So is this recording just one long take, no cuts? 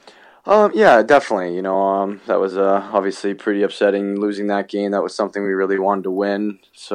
yes; 0 cuts

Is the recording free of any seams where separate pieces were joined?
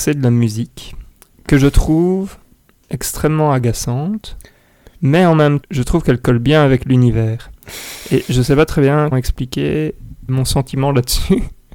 no; 3 cuts; at 5.6 s, 9.1 s, 10.3 s

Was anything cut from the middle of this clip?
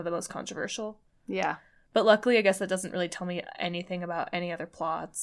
no; 0 cuts

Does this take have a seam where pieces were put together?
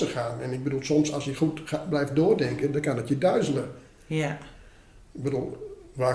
no; 0 cuts

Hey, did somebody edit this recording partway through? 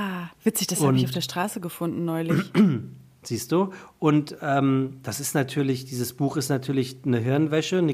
no; 0 cuts

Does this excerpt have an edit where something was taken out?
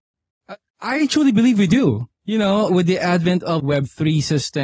yes; 3 cuts; at 2.2 s, 2.7 s, 3.6 s

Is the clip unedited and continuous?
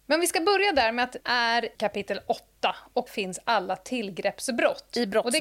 no; 3 cuts; at 1.2 s, 1.7 s, 3.1 s

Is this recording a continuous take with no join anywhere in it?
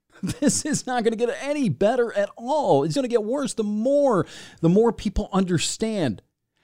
no; 1 cut; at 2.9 s

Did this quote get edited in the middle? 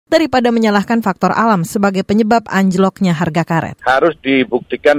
no; 0 cuts

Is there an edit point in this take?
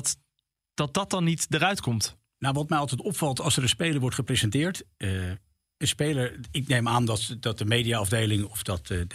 no; 0 cuts

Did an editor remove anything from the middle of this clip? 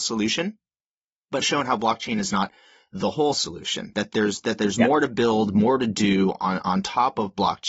yes; 1 cut; at 1.4 s

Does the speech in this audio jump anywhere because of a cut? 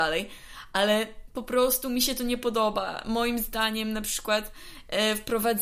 no; 0 cuts

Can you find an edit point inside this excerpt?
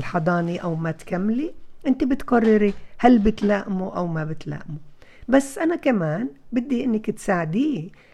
no; 0 cuts

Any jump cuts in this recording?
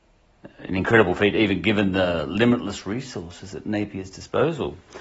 no; 0 cuts

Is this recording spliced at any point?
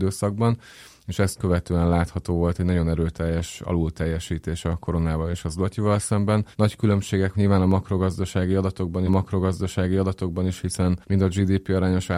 yes; 4 cuts; at 6.5 s, 7.3 s, 9.1 s, 11.0 s

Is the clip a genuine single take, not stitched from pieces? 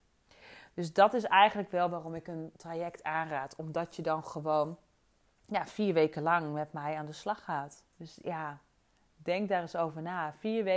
no; 1 cut; at 7.9 s

